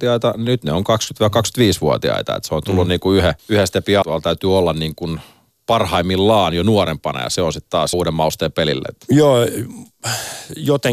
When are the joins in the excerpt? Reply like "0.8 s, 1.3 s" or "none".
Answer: 3.4 s, 4.0 s, 7.9 s